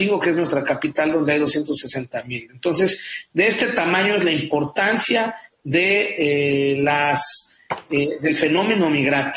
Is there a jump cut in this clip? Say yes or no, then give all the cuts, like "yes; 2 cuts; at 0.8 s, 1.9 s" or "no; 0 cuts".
no; 0 cuts